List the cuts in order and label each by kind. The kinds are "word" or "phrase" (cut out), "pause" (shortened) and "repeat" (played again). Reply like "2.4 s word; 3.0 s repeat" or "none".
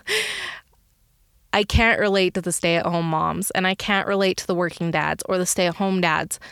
none